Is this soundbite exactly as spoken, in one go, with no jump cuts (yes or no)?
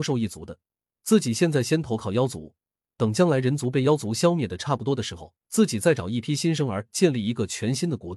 no